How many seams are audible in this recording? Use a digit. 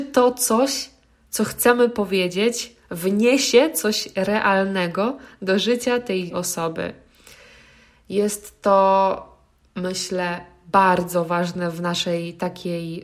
1